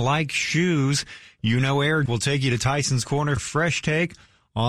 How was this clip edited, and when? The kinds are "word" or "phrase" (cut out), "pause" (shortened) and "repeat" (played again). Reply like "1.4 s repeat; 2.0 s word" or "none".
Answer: 2.1 s word; 3.4 s word